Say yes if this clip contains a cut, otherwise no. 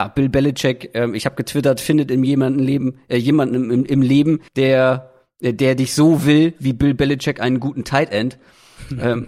yes